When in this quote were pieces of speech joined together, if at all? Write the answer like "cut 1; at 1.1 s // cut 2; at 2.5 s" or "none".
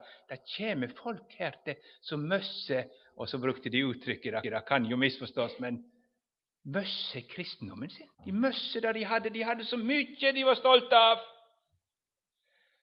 cut 1; at 4.4 s // cut 2; at 8.1 s